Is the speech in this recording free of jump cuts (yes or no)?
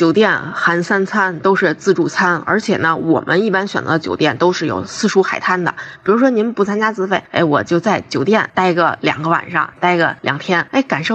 yes